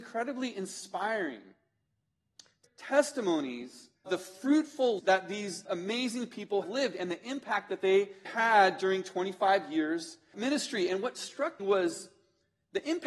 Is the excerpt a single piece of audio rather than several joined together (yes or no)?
no